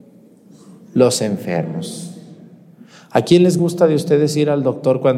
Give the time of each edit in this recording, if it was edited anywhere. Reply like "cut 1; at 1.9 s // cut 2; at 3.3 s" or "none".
none